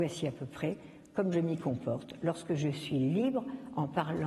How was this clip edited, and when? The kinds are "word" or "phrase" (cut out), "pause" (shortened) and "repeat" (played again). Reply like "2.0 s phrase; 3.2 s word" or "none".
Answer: none